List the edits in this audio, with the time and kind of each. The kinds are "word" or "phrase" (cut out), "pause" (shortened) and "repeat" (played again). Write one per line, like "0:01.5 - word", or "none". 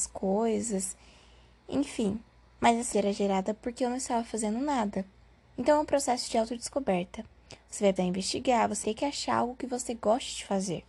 0:02.9 - word
0:08.0 - word
0:08.8 - word